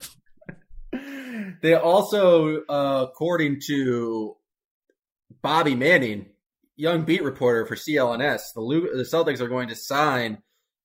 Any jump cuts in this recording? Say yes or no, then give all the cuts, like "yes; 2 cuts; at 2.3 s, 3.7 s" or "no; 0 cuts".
no; 0 cuts